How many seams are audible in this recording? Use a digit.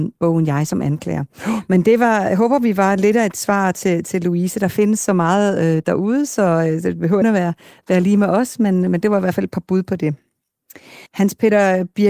2